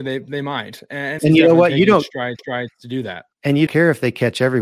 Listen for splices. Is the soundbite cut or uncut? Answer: cut